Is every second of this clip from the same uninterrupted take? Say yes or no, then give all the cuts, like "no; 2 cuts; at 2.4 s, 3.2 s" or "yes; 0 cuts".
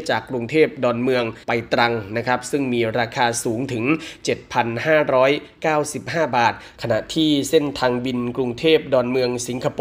no; 1 cut; at 1.4 s